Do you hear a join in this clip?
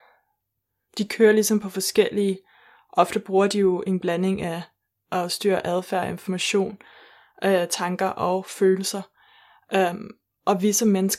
no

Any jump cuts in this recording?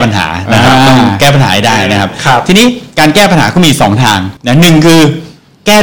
yes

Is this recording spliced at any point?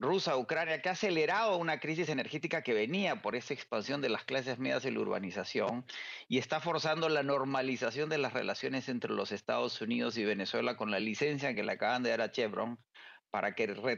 no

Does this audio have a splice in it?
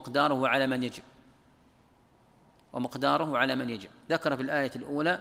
no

